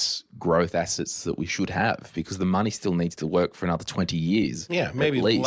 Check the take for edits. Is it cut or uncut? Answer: uncut